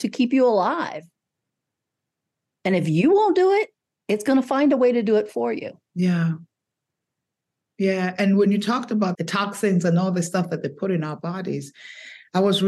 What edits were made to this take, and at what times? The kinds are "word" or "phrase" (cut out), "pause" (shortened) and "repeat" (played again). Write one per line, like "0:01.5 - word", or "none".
none